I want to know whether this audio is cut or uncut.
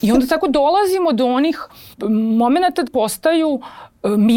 cut